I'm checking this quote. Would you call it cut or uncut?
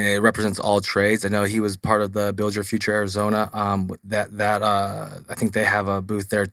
uncut